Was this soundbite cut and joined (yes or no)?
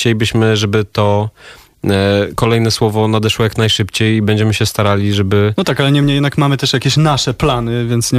yes